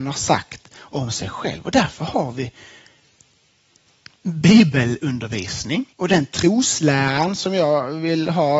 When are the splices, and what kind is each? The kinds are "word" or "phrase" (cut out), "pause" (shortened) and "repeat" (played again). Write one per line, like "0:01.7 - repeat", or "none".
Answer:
0:05.9 - pause